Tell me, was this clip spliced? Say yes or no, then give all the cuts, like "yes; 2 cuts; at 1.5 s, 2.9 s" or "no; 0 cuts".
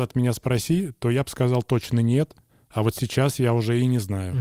no; 0 cuts